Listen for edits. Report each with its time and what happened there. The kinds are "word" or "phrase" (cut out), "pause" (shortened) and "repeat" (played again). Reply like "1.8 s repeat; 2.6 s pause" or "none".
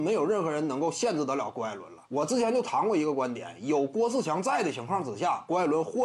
2.1 s pause

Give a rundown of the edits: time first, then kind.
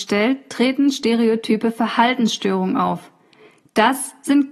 none

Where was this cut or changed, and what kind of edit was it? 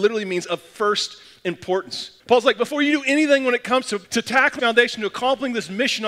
2.2 s pause; 4.0 s pause; 4.6 s word

